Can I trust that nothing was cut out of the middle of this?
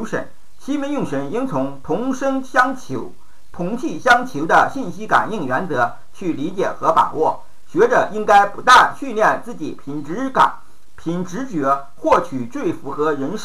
no; 1 cut; at 3.5 s

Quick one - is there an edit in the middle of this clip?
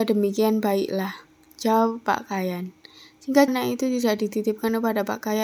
yes; 1 cut; at 3.5 s

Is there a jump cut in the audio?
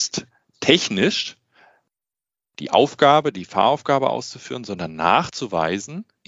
no; 0 cuts

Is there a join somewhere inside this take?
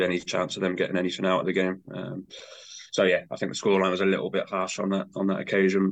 no; 0 cuts

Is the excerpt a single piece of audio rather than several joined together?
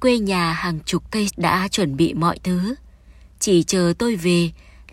no; 1 cut; at 1.3 s

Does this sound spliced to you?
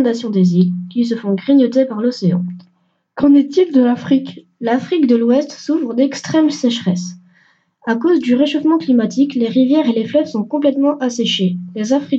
no; 0 cuts

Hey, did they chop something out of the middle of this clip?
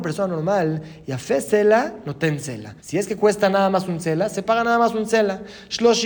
yes; 1 cut; at 2.8 s

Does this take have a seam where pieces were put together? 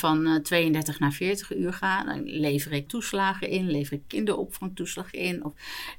yes; 1 cut; at 2.9 s

